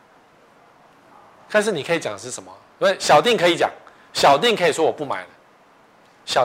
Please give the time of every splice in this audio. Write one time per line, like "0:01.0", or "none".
none

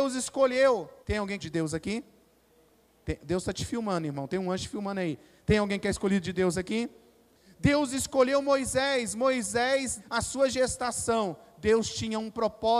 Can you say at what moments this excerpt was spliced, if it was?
0:01.0
0:01.4
0:10.0

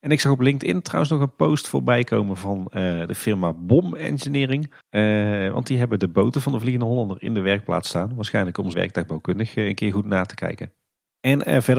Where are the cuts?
0:04.8
0:08.7

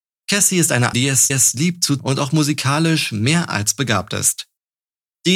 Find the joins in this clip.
0:00.9
0:01.3
0:02.0

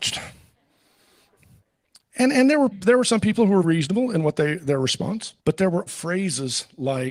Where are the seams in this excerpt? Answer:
0:02.7
0:03.6
0:05.4
0:05.9

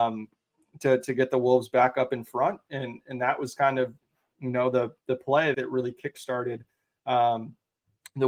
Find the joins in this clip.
0:05.5

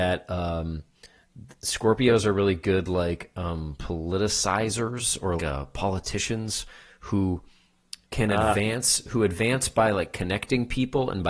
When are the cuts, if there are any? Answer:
0:05.4
0:08.0

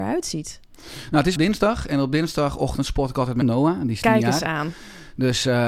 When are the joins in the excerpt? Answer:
0:01.4
0:03.4

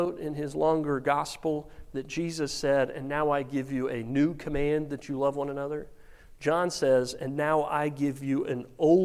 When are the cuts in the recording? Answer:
none

